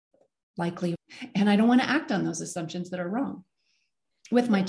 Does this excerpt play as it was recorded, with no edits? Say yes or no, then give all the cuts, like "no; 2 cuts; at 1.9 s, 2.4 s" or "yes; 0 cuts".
no; 1 cut; at 1.0 s